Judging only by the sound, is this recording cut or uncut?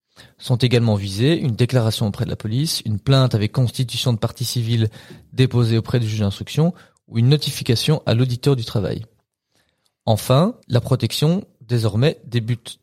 cut